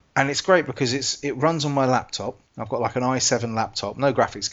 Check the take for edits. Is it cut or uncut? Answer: cut